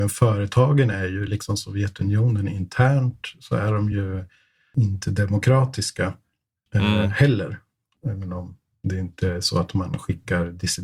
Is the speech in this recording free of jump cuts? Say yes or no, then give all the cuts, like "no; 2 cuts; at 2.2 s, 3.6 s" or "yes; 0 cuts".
yes; 0 cuts